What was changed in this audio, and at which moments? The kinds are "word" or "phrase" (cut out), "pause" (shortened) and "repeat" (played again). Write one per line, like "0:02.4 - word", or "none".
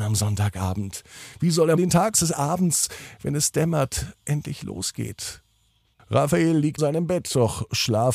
0:01.8 - word
0:02.1 - phrase
0:05.9 - pause
0:06.8 - word